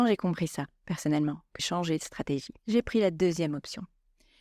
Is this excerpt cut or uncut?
cut